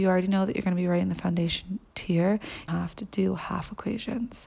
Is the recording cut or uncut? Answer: cut